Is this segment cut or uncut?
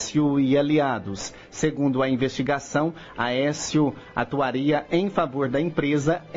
uncut